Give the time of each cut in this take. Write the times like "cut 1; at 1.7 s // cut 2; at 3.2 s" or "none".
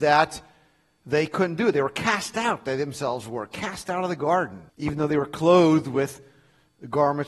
cut 1; at 4.7 s